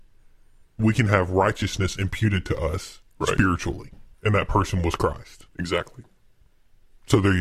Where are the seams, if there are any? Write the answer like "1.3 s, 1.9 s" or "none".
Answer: 4.1 s, 5.5 s

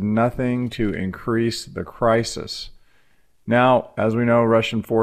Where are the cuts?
none

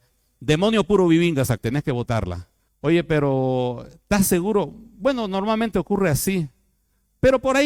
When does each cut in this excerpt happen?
1.6 s, 2.7 s

